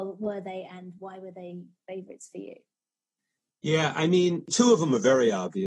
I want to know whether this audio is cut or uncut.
uncut